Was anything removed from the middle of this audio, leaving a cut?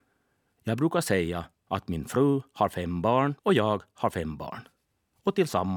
yes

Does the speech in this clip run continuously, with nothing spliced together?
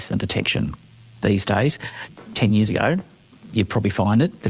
yes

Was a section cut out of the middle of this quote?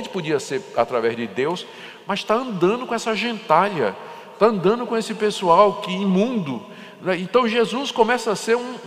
no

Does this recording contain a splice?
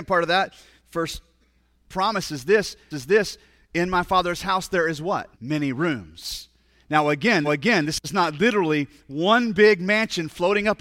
yes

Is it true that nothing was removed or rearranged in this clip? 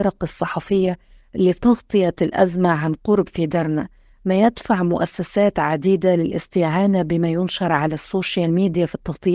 yes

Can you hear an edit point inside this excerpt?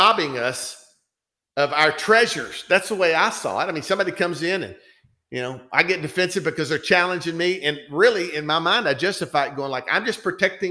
no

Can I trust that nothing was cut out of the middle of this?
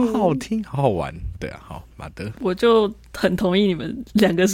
yes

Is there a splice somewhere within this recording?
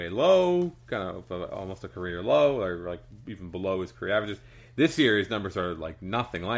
no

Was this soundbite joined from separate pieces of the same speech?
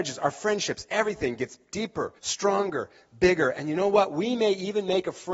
yes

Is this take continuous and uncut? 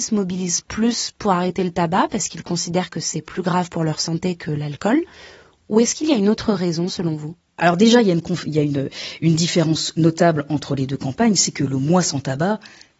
yes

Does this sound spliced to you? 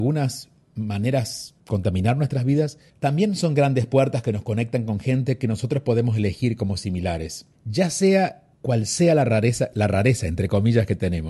yes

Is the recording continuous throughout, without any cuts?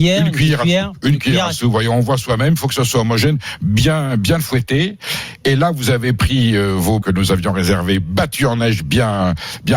no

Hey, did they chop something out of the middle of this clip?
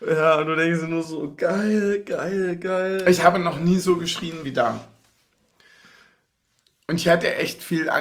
no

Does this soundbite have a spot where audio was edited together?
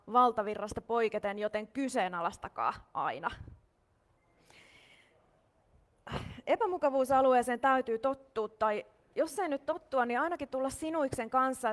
no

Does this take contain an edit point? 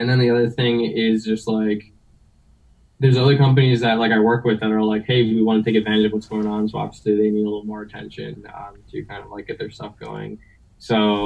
no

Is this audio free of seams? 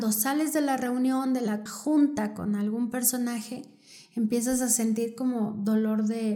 no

